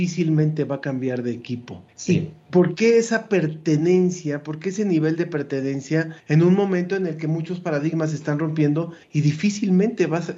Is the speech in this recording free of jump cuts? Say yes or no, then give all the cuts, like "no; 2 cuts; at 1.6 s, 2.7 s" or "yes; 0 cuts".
no; 3 cuts; at 1.9 s, 6.2 s, 9.0 s